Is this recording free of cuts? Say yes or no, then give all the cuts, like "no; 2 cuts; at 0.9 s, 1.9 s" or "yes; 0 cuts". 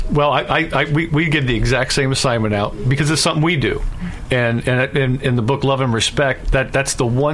yes; 0 cuts